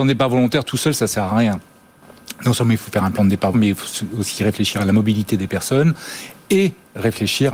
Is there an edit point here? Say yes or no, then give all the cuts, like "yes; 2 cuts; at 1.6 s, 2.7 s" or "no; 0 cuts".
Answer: yes; 1 cut; at 3.5 s